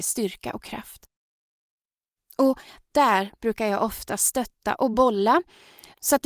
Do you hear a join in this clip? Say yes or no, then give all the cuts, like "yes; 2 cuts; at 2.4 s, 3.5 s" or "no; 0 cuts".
no; 0 cuts